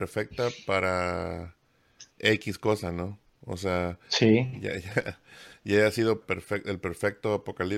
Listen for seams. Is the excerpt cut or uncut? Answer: cut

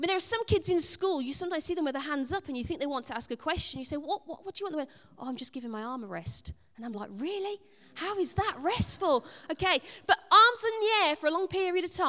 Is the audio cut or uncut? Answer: uncut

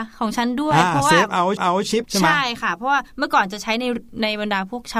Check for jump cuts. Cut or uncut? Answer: cut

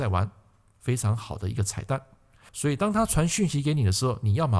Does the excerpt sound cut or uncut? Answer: uncut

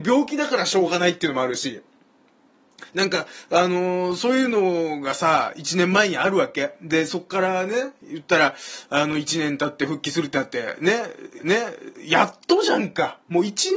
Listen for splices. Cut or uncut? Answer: cut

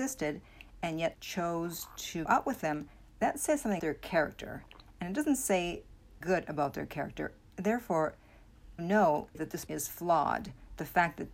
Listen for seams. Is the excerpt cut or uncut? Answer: cut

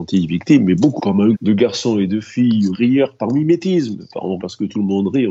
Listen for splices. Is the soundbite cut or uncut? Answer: cut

